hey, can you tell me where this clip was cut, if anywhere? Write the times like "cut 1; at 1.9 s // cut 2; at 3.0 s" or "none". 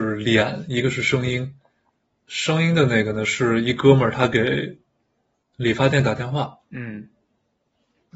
none